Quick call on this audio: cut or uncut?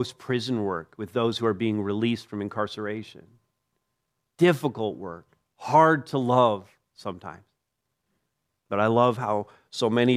uncut